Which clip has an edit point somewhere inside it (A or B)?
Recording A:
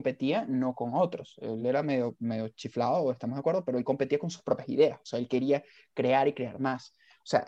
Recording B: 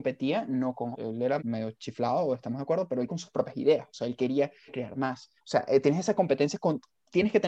B